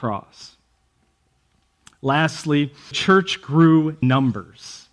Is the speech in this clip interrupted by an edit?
yes; 2 cuts; at 2.9 s, 4.0 s

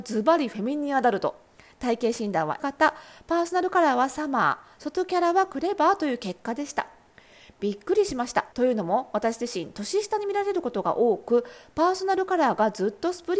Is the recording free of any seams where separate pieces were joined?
no; 2 cuts; at 2.6 s, 8.5 s

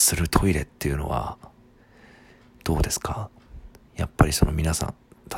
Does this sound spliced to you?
no; 0 cuts

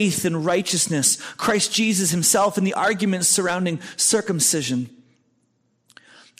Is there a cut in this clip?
no; 0 cuts

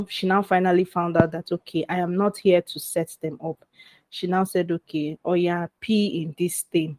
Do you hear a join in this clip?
no; 0 cuts

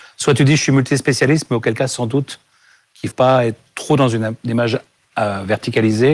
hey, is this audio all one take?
no; 1 cut; at 3.1 s

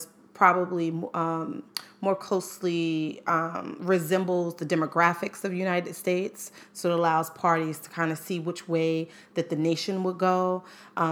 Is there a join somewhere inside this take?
no; 0 cuts

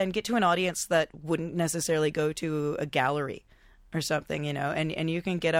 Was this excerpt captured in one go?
yes; 0 cuts

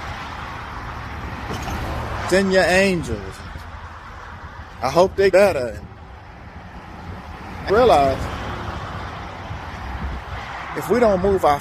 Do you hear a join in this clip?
yes; 3 cuts; at 2.3 s, 5.3 s, 7.7 s

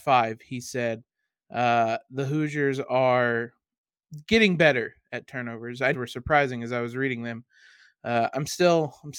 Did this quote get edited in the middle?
yes; 1 cut; at 5.9 s

